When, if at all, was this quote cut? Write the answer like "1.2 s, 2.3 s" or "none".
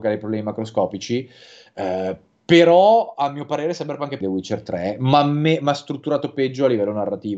4.2 s